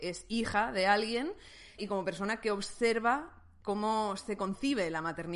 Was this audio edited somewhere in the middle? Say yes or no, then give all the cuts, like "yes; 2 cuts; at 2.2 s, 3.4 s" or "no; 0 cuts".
yes; 2 cuts; at 1.8 s, 3.6 s